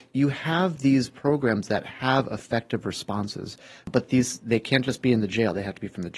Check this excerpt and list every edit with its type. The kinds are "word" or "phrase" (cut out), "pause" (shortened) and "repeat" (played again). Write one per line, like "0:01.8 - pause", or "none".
none